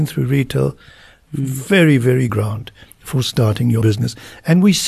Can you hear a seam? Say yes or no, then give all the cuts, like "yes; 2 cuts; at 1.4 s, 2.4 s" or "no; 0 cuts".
yes; 2 cuts; at 2.3 s, 3.8 s